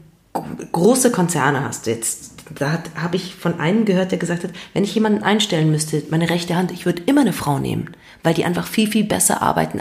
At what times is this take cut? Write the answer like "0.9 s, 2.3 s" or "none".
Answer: none